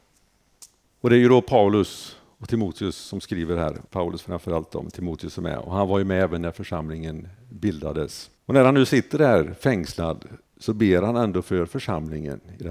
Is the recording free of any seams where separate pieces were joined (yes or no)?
no